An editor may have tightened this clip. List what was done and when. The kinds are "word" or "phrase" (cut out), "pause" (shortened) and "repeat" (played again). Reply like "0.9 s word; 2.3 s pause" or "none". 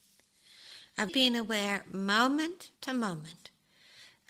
1.1 s word; 2.8 s pause